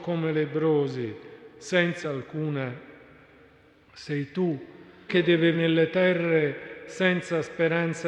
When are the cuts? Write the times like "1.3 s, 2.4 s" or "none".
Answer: 2.0 s, 5.1 s, 5.5 s